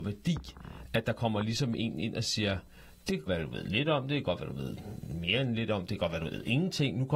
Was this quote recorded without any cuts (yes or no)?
no